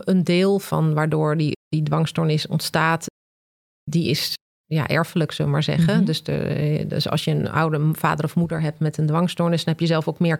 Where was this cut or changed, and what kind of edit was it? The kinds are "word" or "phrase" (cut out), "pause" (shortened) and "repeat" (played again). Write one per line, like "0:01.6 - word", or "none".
none